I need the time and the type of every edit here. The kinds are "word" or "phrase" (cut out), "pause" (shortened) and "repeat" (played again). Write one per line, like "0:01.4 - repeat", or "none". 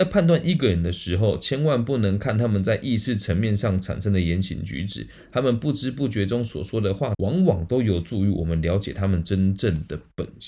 0:07.1 - phrase